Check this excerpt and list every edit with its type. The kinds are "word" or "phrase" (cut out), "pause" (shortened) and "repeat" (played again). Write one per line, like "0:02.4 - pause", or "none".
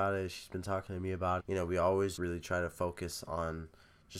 0:01.4 - phrase
0:02.2 - word

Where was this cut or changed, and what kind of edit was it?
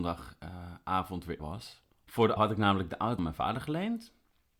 0:01.4 - word
0:02.4 - word
0:03.2 - word

